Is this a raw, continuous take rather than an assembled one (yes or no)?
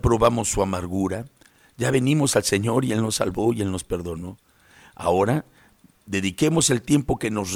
yes